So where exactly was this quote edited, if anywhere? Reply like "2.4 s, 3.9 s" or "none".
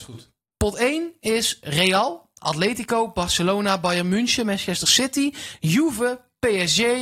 none

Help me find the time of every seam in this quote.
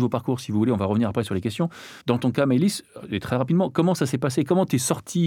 2.0 s

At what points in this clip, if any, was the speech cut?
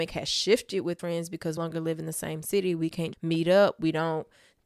1.0 s, 1.6 s, 3.1 s

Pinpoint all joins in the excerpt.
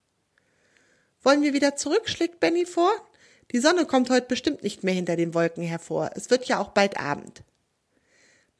none

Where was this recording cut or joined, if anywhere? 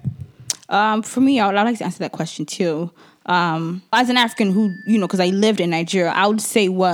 3.9 s

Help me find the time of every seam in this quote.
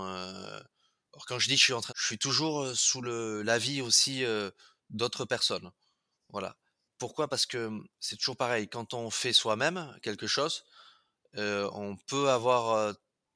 1.9 s, 7.9 s

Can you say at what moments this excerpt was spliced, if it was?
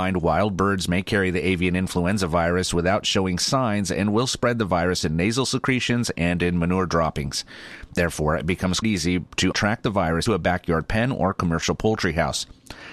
8.8 s, 9.5 s, 10.3 s

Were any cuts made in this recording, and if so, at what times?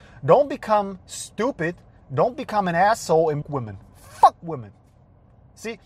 3.4 s

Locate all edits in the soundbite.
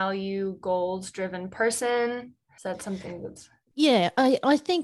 none

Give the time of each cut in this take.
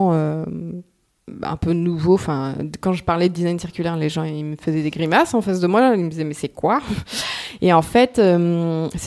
none

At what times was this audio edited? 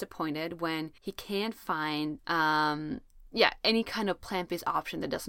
1.0 s, 2.2 s

